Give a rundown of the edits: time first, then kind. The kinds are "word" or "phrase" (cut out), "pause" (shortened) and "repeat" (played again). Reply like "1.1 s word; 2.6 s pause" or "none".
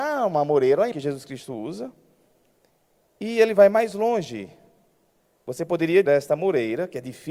0.9 s word; 6.1 s word